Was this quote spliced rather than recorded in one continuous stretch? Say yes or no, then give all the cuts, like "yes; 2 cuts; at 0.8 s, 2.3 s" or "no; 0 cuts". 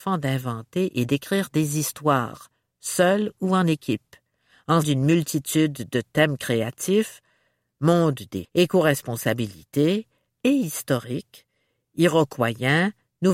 yes; 2 cuts; at 4.8 s, 8.4 s